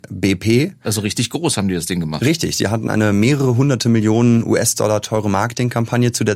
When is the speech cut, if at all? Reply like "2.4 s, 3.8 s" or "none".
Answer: none